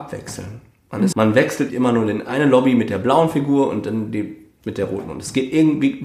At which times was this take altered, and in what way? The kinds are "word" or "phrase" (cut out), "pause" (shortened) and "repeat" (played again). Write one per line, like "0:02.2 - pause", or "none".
0:01.1 - word
0:01.7 - phrase
0:02.3 - word